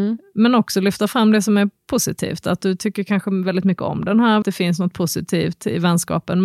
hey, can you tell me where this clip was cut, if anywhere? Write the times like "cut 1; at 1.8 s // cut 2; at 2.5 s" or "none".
cut 1; at 4.4 s